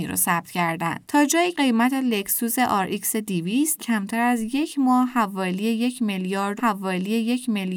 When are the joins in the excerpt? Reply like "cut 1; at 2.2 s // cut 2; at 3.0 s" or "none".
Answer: cut 1; at 1.5 s // cut 2; at 3.8 s // cut 3; at 6.6 s